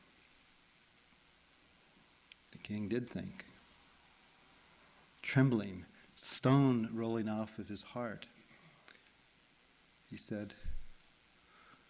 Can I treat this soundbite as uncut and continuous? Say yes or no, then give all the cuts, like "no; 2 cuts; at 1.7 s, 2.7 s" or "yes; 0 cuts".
yes; 0 cuts